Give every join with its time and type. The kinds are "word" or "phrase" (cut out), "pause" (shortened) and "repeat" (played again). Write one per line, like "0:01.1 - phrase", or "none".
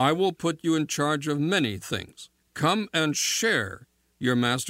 0:02.4 - pause